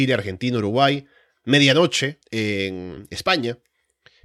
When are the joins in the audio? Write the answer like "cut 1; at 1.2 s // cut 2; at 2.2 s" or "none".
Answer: cut 1; at 2.2 s